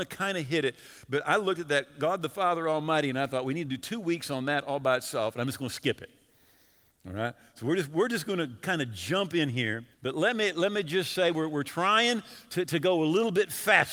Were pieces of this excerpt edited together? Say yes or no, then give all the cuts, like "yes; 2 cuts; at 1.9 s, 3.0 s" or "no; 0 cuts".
yes; 1 cut; at 9.9 s